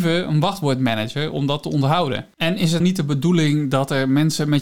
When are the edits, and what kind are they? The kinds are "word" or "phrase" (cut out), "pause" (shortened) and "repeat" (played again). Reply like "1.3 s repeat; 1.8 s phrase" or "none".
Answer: 2.8 s word